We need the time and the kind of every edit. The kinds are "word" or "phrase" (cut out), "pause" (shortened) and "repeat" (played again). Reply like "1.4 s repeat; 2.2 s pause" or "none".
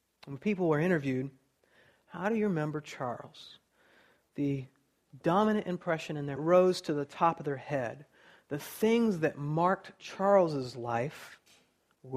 6.4 s phrase